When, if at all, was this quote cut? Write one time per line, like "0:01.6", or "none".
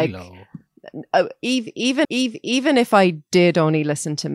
0:02.0